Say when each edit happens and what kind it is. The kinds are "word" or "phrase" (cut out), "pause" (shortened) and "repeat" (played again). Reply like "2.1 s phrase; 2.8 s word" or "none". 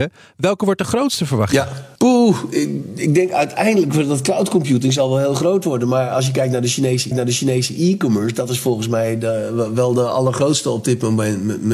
2.0 s pause; 7.1 s repeat